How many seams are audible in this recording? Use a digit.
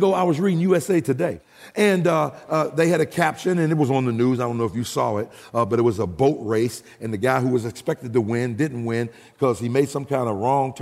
0